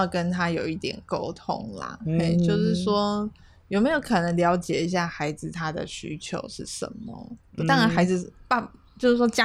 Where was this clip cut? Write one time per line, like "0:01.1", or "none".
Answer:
0:07.6